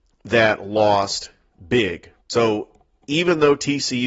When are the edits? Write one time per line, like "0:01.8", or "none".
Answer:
0:02.2